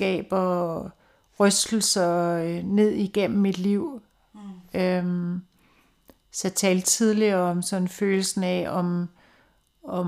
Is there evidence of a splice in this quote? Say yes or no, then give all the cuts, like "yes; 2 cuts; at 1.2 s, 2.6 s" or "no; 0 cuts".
no; 0 cuts